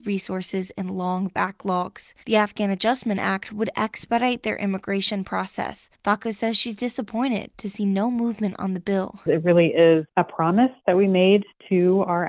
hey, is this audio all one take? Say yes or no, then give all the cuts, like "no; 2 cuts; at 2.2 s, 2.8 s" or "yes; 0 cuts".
no; 3 cuts; at 2.2 s, 5.9 s, 10.1 s